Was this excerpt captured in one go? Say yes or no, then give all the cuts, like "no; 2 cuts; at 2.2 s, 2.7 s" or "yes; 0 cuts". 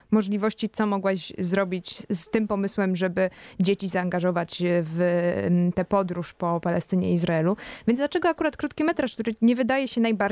yes; 0 cuts